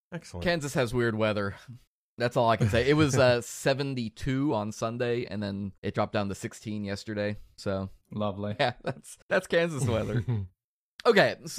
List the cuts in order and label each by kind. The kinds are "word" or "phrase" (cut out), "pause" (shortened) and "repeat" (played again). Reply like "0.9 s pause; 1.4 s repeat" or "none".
1.9 s pause; 5.8 s pause; 8.0 s pause; 9.2 s pause